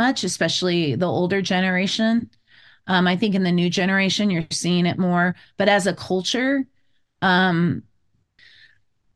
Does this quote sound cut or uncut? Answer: uncut